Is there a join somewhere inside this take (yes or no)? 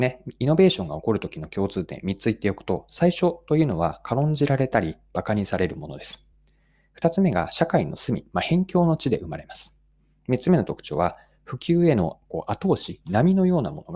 no